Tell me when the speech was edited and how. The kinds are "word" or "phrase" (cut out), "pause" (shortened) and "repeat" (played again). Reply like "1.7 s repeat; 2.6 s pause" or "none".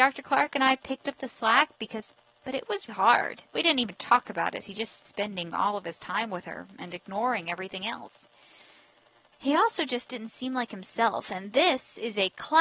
2.4 s phrase; 2.9 s word; 3.5 s pause; 5.0 s word